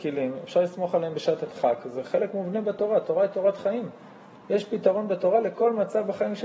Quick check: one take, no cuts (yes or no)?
yes